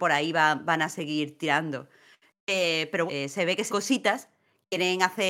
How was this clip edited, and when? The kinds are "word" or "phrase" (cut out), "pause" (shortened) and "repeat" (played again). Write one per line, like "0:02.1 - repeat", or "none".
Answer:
0:03.1 - phrase
0:03.7 - word